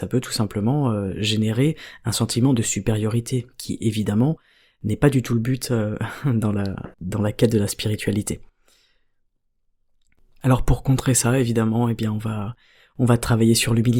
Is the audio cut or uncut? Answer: cut